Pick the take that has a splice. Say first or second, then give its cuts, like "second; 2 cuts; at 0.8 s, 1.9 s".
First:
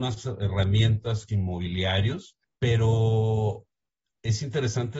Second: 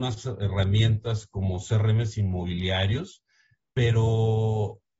first; 2 cuts; at 1.3 s, 2.4 s